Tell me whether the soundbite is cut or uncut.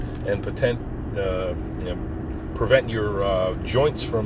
uncut